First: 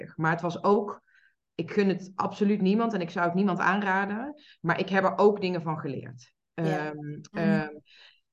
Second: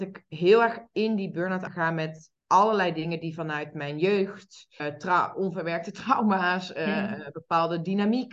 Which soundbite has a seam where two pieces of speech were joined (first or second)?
second